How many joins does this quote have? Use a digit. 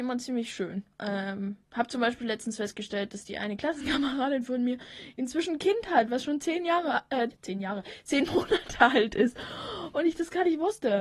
2